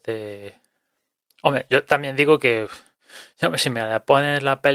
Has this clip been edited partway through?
no; 0 cuts

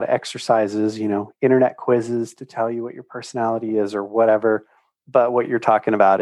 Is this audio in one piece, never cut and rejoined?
yes; 0 cuts

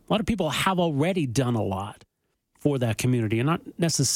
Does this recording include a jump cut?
no; 0 cuts

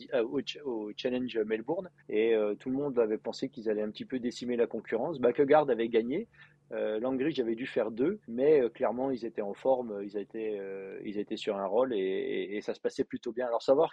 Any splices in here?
yes; 2 cuts; at 2.0 s, 8.2 s

